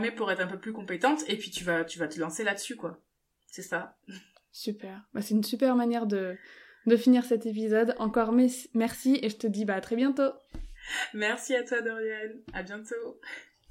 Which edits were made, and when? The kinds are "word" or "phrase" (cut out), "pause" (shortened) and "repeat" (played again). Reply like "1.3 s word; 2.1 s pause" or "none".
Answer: none